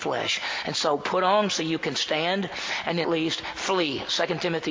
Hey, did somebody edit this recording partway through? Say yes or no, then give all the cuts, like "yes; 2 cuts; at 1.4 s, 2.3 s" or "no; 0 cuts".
yes; 2 cuts; at 1.5 s, 3.0 s